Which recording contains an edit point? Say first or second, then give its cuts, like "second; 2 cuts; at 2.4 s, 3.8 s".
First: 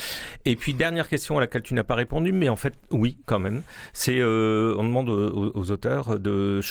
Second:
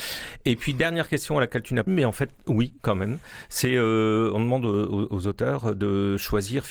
second; 1 cut; at 1.9 s